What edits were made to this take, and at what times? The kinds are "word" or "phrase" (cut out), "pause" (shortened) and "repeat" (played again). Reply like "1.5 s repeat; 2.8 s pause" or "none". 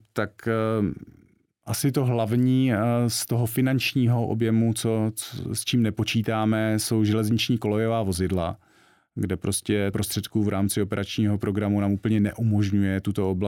9.9 s phrase